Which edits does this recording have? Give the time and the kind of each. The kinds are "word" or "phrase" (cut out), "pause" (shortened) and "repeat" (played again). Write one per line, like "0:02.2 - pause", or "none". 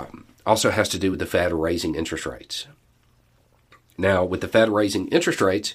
none